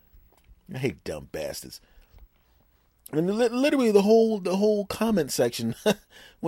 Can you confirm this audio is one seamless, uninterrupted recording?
yes; 0 cuts

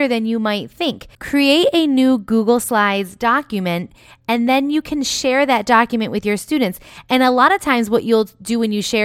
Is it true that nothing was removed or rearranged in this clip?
no; 1 cut; at 1.1 s

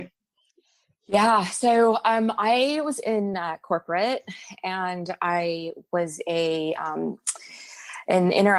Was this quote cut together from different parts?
no; 0 cuts

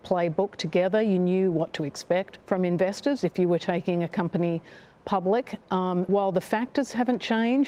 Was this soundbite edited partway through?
yes; 2 cuts; at 2.4 s, 6.1 s

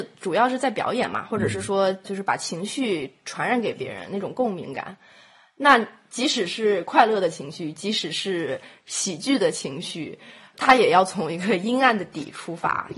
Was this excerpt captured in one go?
no; 2 cuts; at 2.0 s, 10.5 s

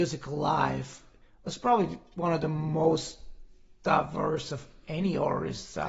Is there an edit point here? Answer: no; 0 cuts

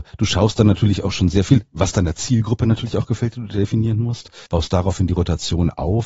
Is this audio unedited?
no; 1 cut; at 4.5 s

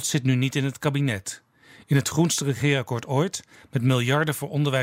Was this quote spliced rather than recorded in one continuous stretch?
no; 0 cuts

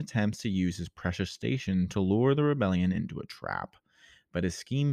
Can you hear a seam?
no; 0 cuts

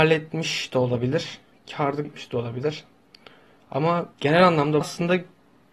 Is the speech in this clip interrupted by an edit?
yes; 3 cuts; at 2.0 s, 4.1 s, 4.8 s

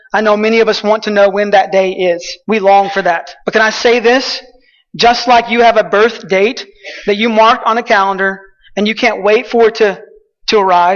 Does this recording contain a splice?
yes; 2 cuts; at 2.4 s, 3.4 s

